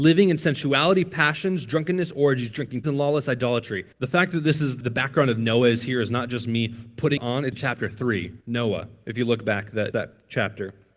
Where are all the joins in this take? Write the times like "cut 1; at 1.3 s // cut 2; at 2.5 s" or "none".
cut 1; at 2.8 s // cut 2; at 3.9 s // cut 3; at 4.8 s // cut 4; at 7.2 s // cut 5; at 7.5 s // cut 6; at 8.4 s // cut 7; at 9.9 s